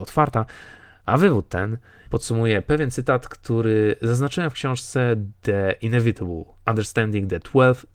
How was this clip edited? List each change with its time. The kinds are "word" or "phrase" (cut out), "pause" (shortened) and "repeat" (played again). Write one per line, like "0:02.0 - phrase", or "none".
0:02.0 - word